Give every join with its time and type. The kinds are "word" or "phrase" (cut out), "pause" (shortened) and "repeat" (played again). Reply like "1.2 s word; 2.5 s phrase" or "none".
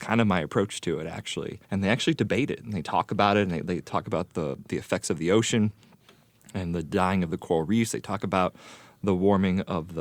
1.6 s pause

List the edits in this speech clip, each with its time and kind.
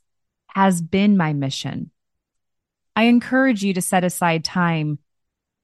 none

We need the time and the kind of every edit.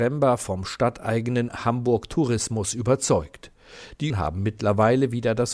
1.5 s word; 4.1 s word

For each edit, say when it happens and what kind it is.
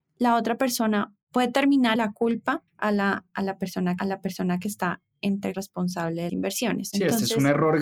2.0 s word; 2.7 s pause; 4.0 s repeat; 5.5 s word; 6.3 s word

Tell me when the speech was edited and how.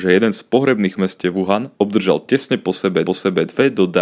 1.0 s word; 1.7 s pause; 3.1 s repeat

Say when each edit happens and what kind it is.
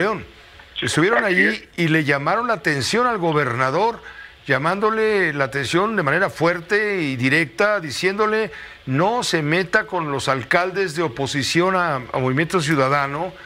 none

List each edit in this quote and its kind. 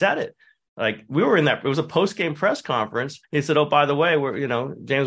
3.2 s pause

